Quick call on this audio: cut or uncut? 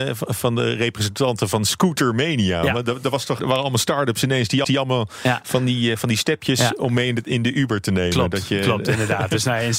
cut